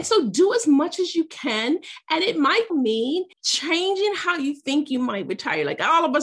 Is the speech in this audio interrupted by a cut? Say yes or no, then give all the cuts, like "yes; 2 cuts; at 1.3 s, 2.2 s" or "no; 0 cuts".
yes; 2 cuts; at 2.7 s, 3.3 s